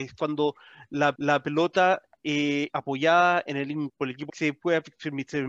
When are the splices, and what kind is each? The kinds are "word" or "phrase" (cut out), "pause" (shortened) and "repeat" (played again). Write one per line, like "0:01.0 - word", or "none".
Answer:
0:01.2 - repeat
0:02.7 - word
0:03.9 - word
0:04.3 - phrase